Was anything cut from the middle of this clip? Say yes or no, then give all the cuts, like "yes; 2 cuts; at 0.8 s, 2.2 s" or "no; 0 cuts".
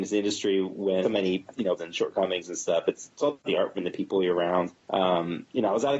yes; 5 cuts; at 1.0 s, 1.8 s, 3.4 s, 3.8 s, 4.8 s